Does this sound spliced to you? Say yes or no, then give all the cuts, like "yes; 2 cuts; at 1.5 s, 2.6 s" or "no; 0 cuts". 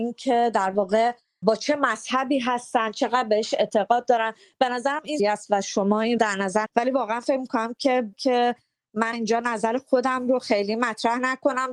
yes; 6 cuts; at 1.4 s, 5.2 s, 6.2 s, 6.7 s, 8.1 s, 9.1 s